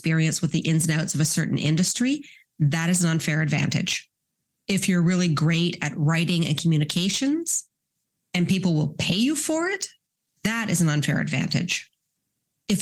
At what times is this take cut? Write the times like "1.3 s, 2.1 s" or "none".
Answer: none